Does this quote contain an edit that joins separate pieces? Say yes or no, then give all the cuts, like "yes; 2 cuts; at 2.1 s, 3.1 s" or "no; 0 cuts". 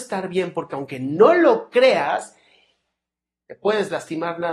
no; 0 cuts